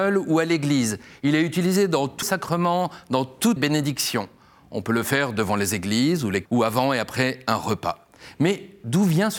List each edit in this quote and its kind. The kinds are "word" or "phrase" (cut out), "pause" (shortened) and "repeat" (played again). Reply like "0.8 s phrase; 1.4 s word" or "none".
2.2 s word; 3.6 s word; 6.5 s word